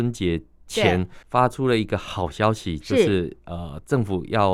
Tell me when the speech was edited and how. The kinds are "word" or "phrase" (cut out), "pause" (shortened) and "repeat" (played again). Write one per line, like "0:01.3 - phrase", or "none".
0:01.2 - pause